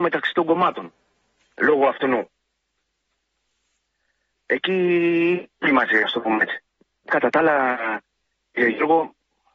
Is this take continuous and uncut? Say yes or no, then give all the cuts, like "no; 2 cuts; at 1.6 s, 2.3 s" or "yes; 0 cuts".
yes; 0 cuts